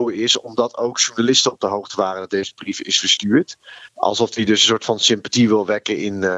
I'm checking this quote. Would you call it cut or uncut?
cut